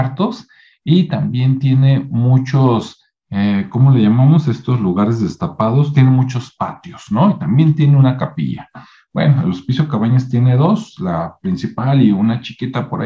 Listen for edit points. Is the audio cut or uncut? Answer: uncut